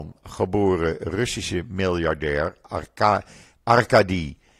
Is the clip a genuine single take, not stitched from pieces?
yes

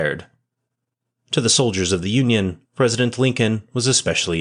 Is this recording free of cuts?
no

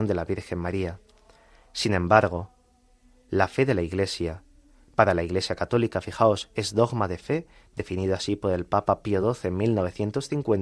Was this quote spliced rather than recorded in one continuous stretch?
no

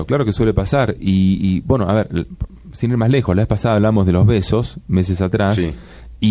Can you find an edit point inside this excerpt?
no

